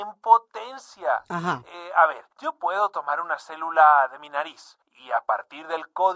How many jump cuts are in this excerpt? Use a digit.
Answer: 2